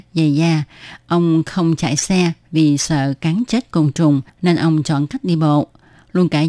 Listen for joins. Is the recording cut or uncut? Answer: cut